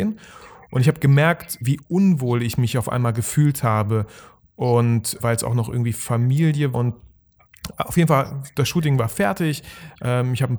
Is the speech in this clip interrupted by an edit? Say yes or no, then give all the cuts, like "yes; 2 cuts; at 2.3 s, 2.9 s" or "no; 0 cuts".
yes; 3 cuts; at 1.6 s, 5.2 s, 6.7 s